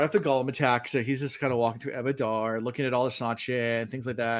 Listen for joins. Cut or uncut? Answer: uncut